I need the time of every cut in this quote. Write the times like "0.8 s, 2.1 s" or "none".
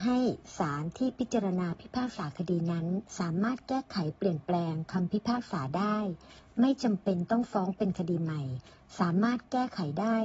3.1 s